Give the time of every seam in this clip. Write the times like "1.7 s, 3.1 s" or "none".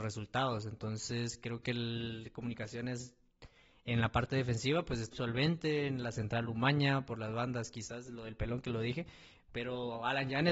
5.1 s